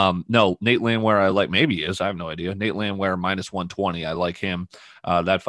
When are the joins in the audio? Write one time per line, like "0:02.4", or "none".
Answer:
none

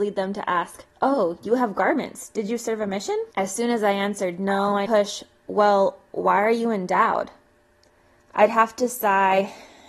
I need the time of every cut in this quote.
0:00.9
0:03.3
0:04.9

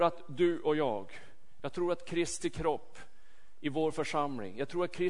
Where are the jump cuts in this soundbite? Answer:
none

